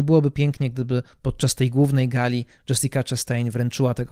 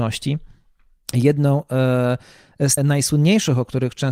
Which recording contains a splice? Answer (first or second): second